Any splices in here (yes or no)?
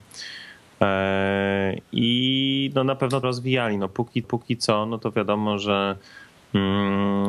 yes